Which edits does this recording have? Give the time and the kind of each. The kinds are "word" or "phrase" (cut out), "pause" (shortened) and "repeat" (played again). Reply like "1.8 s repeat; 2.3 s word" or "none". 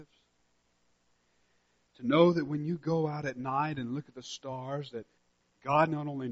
none